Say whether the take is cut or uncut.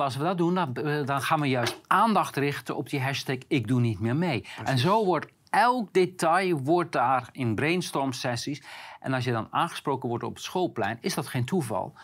uncut